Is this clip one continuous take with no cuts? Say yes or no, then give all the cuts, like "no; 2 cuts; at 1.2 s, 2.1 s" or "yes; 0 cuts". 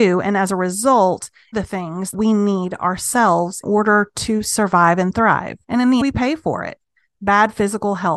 no; 5 cuts; at 1.5 s, 2.1 s, 3.6 s, 5.6 s, 6.0 s